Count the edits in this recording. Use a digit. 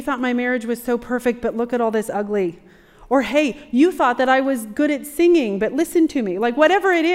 0